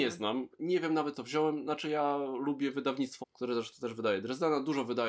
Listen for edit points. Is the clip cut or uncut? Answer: cut